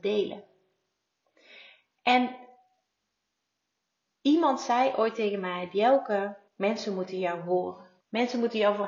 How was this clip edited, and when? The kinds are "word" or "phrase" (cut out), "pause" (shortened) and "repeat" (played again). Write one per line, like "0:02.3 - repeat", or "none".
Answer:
0:06.5 - pause
0:08.0 - pause